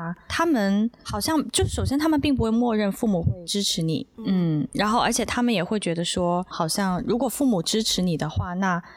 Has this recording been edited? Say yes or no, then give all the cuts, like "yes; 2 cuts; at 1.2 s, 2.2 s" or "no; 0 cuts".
yes; 2 cuts; at 4.1 s, 6.5 s